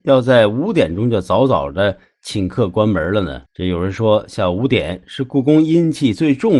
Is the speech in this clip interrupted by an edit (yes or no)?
yes